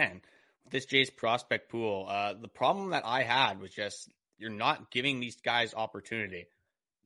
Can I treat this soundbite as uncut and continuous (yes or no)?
yes